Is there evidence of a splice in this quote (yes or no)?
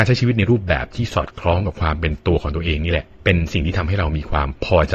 yes